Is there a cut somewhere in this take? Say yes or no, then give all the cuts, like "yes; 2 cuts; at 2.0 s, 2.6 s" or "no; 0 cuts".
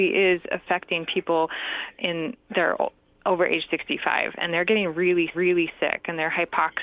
yes; 2 cuts; at 3.0 s, 5.3 s